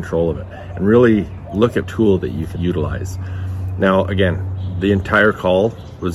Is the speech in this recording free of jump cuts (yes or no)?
no